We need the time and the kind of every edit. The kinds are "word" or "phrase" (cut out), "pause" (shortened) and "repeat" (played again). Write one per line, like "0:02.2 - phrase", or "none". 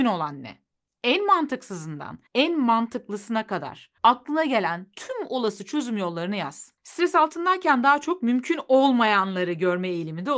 0:02.3 - pause
0:04.0 - pause